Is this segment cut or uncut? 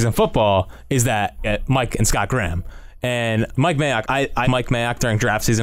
cut